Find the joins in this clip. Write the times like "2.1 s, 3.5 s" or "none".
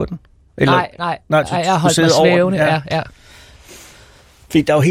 none